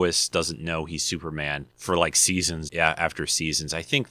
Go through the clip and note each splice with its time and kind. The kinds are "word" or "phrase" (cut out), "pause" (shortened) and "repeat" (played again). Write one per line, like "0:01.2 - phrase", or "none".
0:01.7 - pause
0:02.7 - word